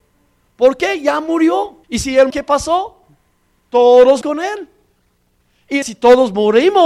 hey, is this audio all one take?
no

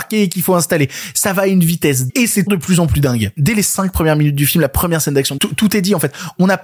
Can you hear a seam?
yes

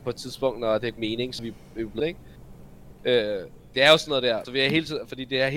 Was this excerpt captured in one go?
no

